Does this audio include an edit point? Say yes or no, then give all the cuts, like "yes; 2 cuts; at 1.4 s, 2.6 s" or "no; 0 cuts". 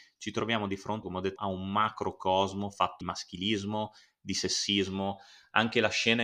yes; 3 cuts; at 1.0 s, 1.4 s, 3.0 s